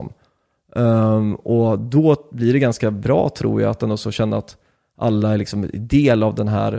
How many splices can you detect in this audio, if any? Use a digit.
0